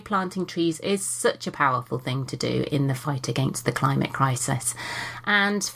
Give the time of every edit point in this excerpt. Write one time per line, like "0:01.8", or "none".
none